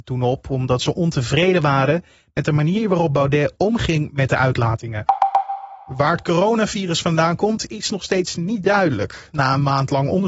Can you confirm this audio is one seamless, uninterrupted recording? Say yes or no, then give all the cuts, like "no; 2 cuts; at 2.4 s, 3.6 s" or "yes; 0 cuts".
yes; 0 cuts